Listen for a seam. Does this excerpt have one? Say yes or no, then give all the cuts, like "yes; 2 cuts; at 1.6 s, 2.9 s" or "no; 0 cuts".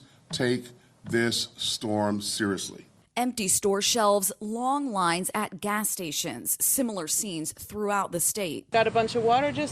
no; 0 cuts